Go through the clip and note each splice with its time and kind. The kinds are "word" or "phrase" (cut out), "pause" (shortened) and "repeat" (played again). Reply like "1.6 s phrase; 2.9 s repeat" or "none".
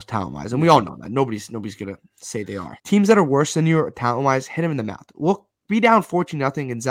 2.8 s pause